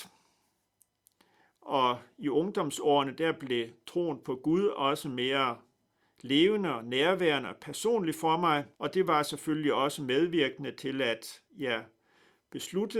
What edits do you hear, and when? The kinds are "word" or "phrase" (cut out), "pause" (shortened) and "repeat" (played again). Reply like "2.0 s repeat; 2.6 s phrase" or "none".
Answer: 8.7 s pause; 11.5 s pause